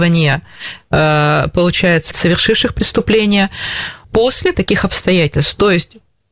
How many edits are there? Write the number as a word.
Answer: three